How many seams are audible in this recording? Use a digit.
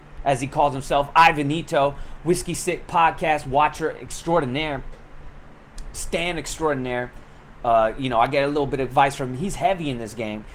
1